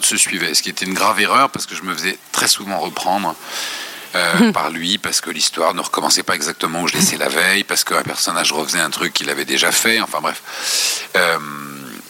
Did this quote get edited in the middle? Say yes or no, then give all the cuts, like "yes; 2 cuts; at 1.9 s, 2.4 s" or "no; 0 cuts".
yes; 1 cut; at 6.9 s